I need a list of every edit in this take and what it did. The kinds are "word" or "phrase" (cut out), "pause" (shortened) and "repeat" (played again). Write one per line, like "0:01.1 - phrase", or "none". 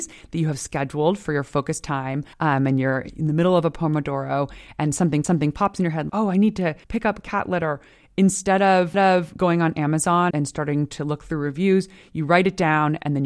0:02.3 - pause
0:05.2 - repeat
0:06.1 - word
0:06.8 - pause
0:08.9 - repeat
0:10.3 - word